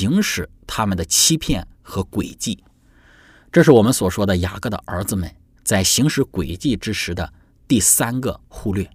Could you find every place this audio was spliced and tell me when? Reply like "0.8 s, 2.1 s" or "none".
none